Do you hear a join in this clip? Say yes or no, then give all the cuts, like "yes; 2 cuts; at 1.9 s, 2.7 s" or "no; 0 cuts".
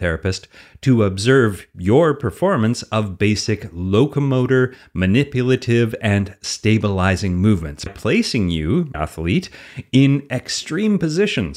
yes; 2 cuts; at 7.9 s, 8.9 s